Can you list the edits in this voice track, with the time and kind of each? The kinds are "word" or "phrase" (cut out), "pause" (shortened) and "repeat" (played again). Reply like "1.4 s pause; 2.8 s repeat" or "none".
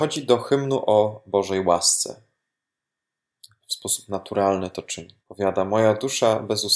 5.2 s pause